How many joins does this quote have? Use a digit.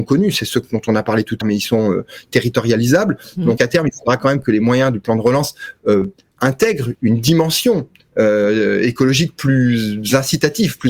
3